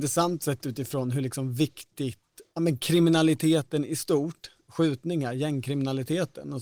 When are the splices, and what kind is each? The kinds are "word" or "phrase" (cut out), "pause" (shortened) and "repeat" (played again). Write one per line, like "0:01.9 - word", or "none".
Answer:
none